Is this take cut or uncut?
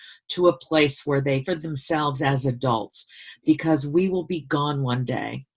cut